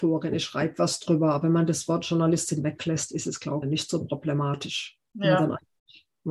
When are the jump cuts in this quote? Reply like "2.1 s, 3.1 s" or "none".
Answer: 3.6 s

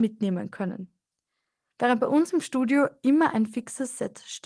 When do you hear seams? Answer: none

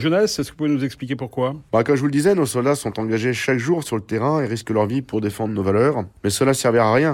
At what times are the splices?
none

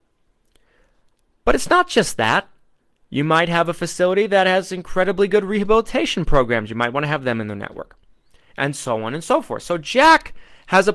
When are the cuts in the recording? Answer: none

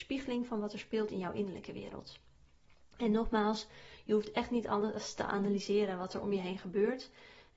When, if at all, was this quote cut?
none

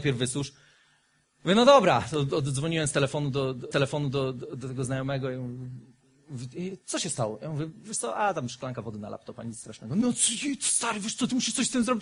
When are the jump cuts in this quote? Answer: 3.7 s

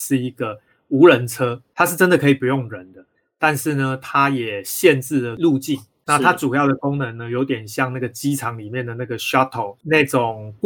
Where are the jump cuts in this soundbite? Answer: none

